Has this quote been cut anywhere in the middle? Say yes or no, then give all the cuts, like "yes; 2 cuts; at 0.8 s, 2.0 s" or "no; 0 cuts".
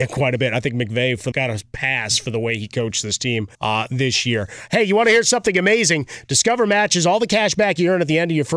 yes; 2 cuts; at 1.3 s, 3.5 s